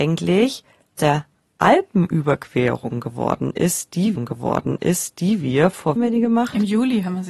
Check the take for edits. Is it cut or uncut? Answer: cut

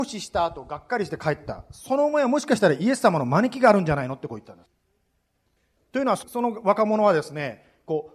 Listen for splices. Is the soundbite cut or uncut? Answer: uncut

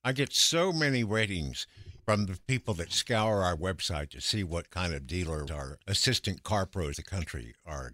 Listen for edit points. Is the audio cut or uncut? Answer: cut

